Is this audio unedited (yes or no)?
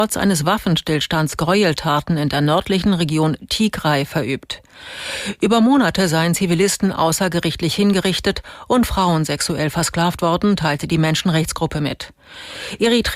yes